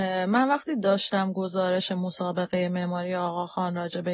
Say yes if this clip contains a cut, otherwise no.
no